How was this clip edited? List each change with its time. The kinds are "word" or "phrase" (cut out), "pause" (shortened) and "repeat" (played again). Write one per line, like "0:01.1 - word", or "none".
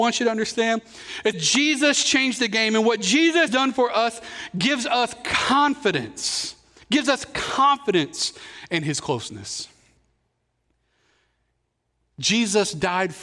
0:01.3 - word
0:03.5 - word